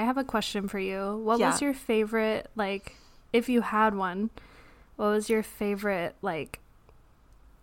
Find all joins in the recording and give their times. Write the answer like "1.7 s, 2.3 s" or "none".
none